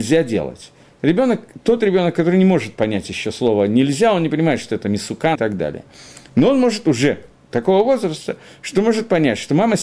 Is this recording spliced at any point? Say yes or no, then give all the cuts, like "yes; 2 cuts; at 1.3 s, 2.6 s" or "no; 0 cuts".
yes; 1 cut; at 5.3 s